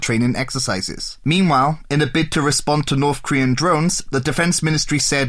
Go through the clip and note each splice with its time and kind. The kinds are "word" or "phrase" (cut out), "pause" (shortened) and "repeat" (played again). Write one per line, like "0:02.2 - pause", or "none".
none